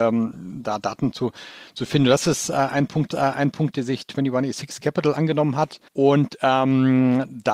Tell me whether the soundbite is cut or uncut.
cut